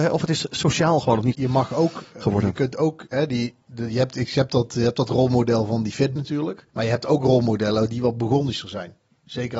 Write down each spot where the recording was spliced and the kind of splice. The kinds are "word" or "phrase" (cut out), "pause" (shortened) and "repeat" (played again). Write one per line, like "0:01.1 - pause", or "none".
0:01.3 - phrase
0:03.6 - pause
0:06.2 - word
0:06.7 - pause